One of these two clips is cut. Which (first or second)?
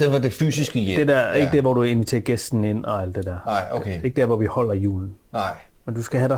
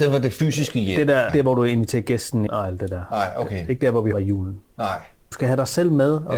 second